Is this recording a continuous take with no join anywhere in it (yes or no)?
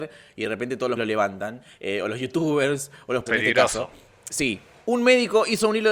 no